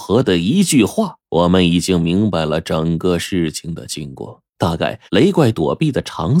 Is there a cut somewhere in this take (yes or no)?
yes